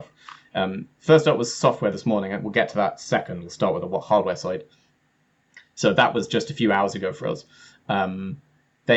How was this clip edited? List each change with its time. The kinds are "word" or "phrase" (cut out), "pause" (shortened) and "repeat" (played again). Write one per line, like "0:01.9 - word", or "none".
none